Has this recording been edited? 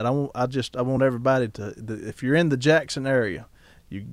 no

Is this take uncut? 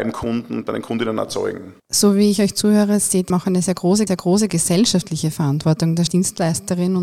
no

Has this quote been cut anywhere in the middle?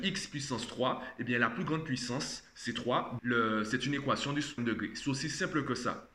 yes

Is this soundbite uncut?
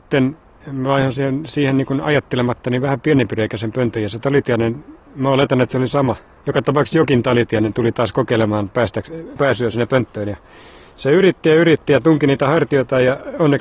yes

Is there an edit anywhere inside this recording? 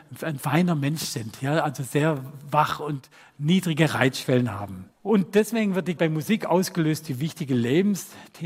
yes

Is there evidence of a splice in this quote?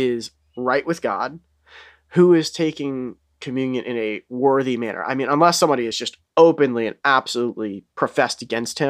no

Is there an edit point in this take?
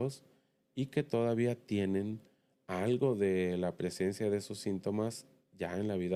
no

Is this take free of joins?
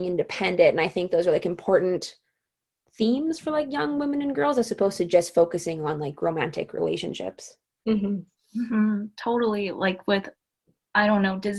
yes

